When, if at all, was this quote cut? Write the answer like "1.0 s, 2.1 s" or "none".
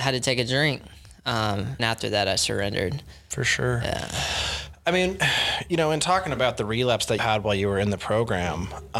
1.8 s, 7.2 s